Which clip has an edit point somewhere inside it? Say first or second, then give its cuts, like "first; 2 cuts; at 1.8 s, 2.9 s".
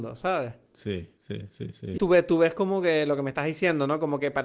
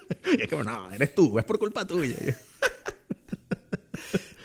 first; 2 cuts; at 1.2 s, 2.0 s